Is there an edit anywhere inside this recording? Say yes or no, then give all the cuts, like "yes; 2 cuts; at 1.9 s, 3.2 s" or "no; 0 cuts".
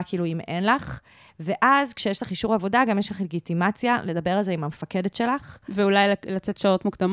no; 0 cuts